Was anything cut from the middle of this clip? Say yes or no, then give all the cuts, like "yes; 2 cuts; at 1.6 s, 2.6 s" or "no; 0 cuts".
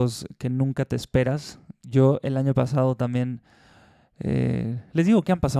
no; 0 cuts